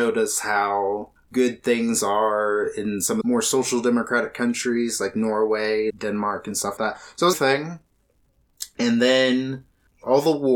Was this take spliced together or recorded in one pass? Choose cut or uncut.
cut